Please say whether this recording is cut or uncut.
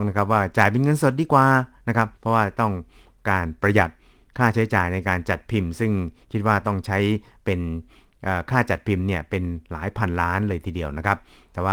cut